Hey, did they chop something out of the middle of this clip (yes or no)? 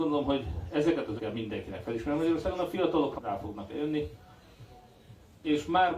yes